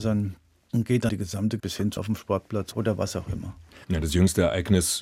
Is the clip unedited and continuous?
no; 3 cuts; at 1.1 s, 1.6 s, 2.0 s

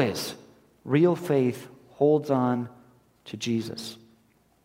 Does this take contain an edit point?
no; 0 cuts

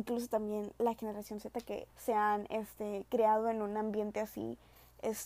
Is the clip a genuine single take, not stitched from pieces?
no; 1 cut; at 1.9 s

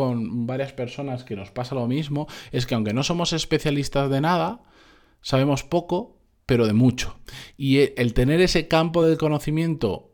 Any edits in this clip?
no; 0 cuts

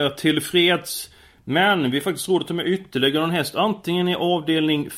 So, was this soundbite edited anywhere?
no; 0 cuts

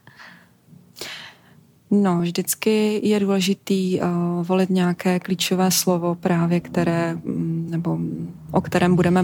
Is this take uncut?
yes; 0 cuts

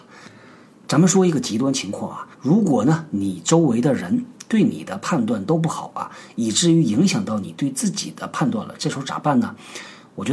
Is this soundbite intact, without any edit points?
no; 1 cut; at 2.3 s

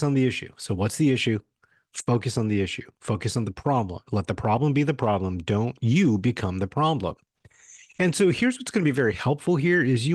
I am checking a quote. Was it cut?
no; 0 cuts

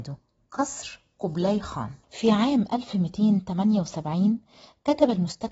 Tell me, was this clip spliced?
yes; 1 cut; at 2.0 s

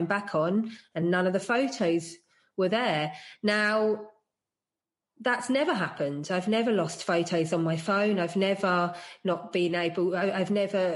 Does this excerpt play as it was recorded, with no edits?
yes; 0 cuts

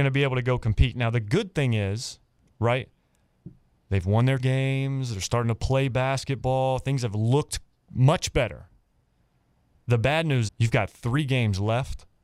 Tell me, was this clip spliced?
yes; 3 cuts; at 4.4 s, 5.9 s, 10.5 s

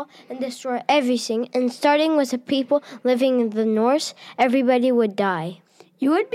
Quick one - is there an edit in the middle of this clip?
no; 0 cuts

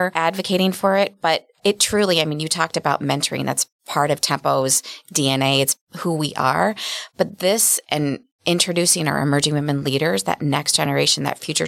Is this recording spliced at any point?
no; 0 cuts

